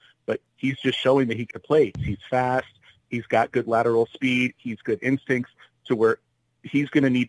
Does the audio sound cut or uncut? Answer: cut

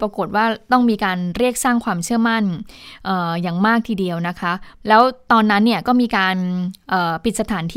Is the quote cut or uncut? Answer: cut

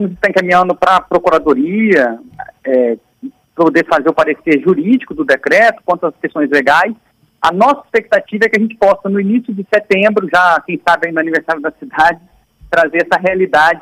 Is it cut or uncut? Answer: uncut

